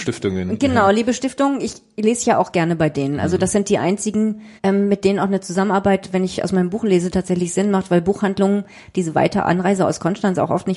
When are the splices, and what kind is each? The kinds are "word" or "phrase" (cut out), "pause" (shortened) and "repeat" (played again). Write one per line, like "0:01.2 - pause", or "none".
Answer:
0:04.6 - pause